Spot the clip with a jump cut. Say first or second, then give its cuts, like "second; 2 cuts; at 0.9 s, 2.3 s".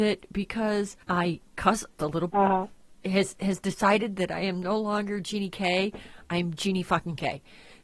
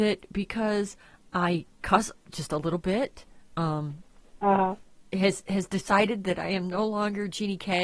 first; 3 cuts; at 1.0 s, 2.0 s, 2.3 s